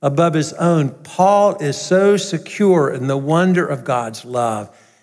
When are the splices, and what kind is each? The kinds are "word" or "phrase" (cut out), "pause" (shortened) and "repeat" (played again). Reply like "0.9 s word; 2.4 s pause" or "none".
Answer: none